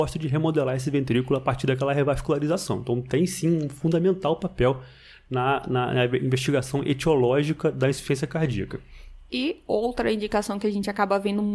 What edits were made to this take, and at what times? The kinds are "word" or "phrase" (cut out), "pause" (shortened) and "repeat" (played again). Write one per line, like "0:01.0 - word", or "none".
none